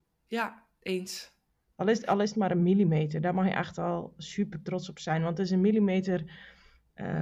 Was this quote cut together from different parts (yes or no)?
no